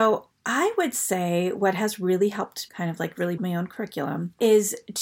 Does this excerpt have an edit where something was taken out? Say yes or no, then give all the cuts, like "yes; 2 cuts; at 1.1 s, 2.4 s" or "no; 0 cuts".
yes; 2 cuts; at 2.7 s, 3.4 s